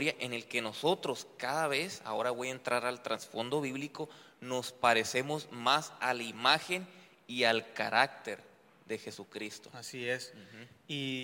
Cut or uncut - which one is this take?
uncut